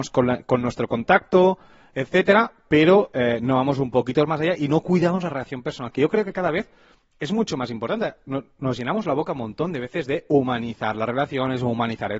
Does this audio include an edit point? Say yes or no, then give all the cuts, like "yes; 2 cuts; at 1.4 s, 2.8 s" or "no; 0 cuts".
no; 0 cuts